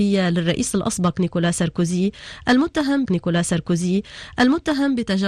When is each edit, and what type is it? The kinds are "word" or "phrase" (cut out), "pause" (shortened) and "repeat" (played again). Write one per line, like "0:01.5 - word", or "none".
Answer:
0:03.0 - repeat